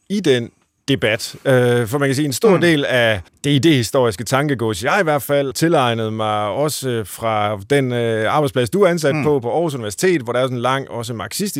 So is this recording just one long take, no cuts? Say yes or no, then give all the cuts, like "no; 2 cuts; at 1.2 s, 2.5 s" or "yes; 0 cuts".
no; 2 cuts; at 3.3 s, 5.5 s